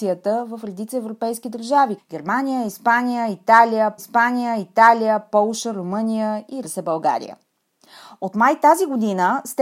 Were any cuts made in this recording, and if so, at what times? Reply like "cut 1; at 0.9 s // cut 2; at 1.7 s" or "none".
cut 1; at 2.0 s // cut 2; at 4.0 s // cut 3; at 6.6 s

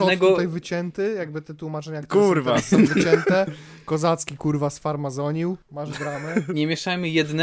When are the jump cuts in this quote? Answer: cut 1; at 5.6 s

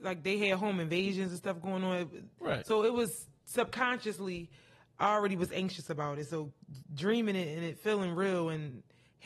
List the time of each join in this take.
none

